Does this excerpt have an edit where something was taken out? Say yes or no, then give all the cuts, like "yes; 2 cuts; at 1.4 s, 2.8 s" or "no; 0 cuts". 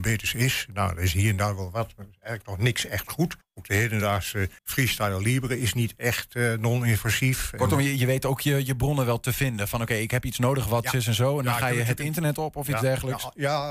yes; 2 cuts; at 3.4 s, 4.6 s